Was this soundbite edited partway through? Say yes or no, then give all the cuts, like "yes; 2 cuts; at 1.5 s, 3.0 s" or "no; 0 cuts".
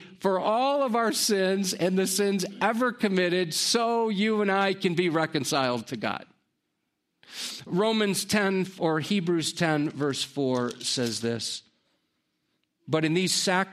no; 0 cuts